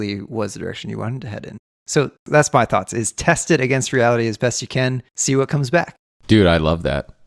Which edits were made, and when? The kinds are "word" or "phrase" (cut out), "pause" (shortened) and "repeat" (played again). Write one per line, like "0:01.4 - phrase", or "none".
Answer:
none